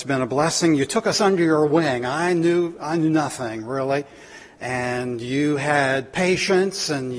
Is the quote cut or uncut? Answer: uncut